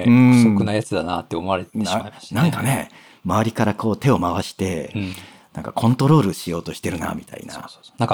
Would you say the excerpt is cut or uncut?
uncut